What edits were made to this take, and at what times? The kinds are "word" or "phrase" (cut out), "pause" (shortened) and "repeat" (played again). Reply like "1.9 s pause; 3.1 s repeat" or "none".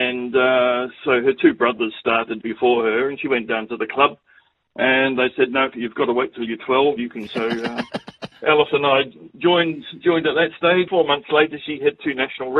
2.4 s word; 5.7 s word; 7.0 s word; 7.3 s word; 8.3 s word; 10.9 s word